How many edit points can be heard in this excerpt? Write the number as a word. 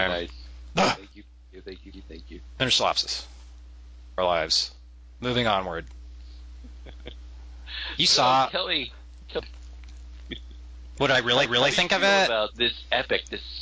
five